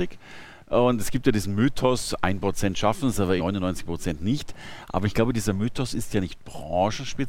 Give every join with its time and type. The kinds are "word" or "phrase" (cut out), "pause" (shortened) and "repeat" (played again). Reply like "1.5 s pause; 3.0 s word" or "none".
3.4 s word